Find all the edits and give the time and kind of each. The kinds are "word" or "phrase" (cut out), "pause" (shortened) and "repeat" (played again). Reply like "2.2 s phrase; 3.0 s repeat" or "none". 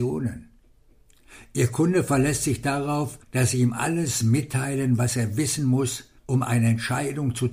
3.2 s pause; 6.2 s pause